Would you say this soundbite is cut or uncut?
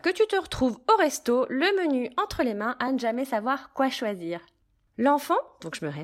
uncut